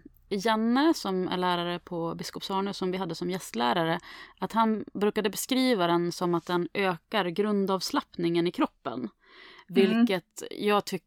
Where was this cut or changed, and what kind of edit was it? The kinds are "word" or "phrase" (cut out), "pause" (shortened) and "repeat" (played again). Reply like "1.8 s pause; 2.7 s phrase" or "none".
none